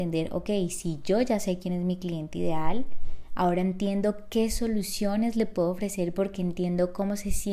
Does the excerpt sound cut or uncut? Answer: uncut